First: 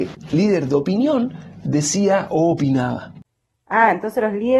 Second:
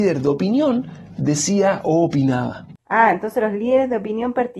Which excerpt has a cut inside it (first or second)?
second